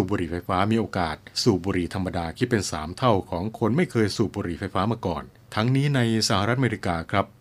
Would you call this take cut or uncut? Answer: cut